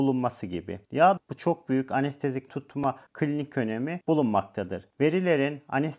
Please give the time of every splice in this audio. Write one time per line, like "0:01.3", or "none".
0:01.2
0:02.5
0:03.1